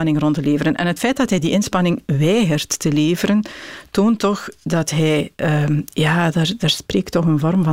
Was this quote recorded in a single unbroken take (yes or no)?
yes